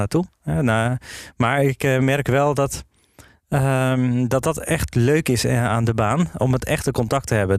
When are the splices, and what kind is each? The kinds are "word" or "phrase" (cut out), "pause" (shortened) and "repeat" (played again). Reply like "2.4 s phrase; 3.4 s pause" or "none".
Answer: none